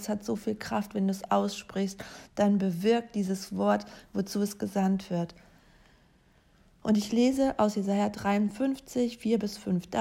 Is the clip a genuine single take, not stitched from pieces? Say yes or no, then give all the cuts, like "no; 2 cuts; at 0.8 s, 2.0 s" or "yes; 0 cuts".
yes; 0 cuts